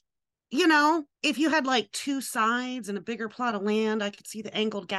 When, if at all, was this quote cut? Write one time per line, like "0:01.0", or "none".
0:01.1